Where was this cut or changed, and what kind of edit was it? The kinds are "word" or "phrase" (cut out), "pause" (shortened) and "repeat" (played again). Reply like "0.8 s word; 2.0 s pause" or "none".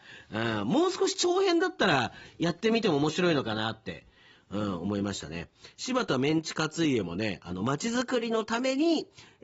none